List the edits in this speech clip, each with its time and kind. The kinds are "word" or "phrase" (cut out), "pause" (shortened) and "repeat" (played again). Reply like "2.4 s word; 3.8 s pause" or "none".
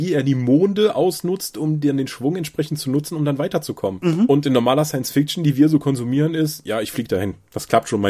none